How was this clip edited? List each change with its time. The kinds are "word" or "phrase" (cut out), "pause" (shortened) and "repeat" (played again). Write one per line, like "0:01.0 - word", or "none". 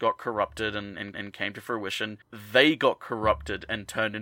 0:01.1 - repeat
0:02.2 - pause